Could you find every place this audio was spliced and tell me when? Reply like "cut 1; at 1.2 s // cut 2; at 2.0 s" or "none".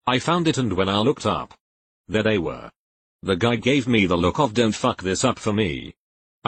none